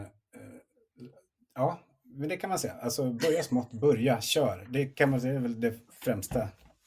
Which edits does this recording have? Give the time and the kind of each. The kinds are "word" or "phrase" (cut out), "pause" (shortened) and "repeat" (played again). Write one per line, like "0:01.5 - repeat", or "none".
none